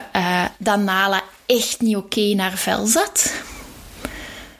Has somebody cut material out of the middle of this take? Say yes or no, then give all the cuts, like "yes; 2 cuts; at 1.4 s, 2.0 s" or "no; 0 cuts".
no; 0 cuts